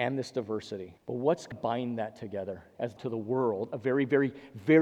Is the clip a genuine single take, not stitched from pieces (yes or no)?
no